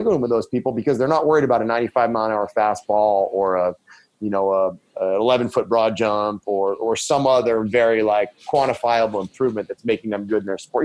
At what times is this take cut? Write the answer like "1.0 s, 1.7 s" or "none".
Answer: none